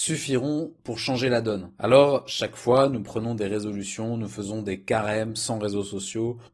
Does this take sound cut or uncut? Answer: cut